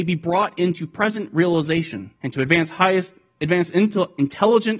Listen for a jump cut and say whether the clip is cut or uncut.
cut